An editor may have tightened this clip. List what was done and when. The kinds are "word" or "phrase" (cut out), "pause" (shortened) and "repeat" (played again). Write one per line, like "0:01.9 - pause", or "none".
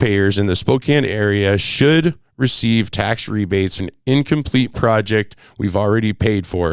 0:03.8 - word